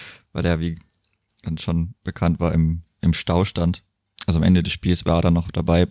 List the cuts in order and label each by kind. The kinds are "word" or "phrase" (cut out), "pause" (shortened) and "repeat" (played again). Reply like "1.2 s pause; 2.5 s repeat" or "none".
none